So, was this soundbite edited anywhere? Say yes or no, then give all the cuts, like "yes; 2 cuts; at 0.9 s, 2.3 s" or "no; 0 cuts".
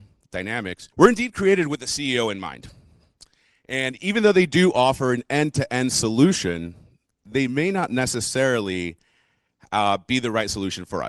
yes; 1 cut; at 0.9 s